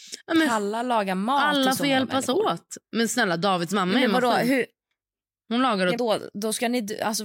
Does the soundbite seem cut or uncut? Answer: cut